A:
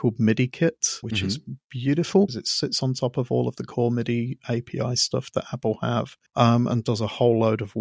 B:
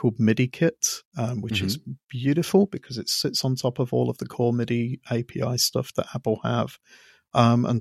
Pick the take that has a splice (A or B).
A